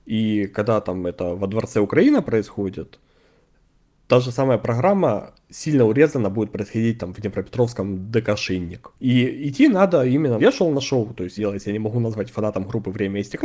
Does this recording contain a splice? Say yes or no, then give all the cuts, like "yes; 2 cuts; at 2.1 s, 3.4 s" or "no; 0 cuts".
yes; 3 cuts; at 8.9 s, 10.4 s, 11.4 s